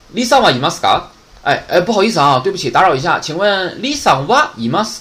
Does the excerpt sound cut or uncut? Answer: uncut